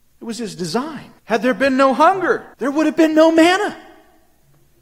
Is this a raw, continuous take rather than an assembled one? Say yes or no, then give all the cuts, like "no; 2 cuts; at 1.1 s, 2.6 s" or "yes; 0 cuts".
no; 2 cuts; at 1.2 s, 2.5 s